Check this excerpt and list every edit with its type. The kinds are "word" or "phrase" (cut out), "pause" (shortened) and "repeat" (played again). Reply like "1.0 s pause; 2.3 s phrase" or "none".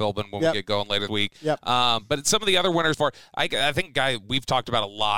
1.1 s word; 2.9 s word